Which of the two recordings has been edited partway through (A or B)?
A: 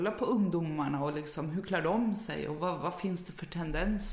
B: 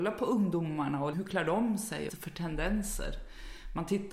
B